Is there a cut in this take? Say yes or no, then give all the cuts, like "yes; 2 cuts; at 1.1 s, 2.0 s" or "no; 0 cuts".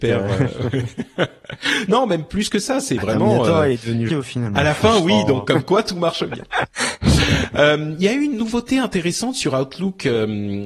yes; 1 cut; at 4.1 s